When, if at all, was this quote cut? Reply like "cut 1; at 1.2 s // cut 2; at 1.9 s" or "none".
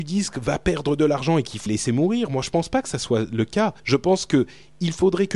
cut 1; at 1.7 s // cut 2; at 3.8 s